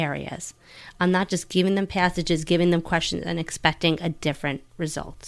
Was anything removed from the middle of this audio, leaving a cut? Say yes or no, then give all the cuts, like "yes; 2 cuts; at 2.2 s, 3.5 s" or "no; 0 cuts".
no; 0 cuts